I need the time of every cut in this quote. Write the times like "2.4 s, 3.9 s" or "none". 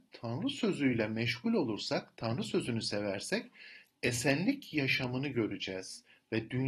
none